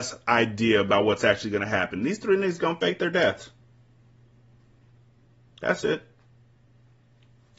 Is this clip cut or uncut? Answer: uncut